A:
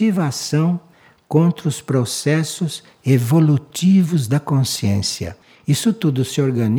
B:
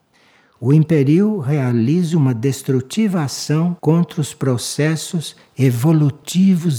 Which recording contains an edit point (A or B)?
B